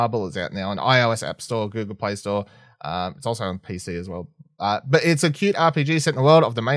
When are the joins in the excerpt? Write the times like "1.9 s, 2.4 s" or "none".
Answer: none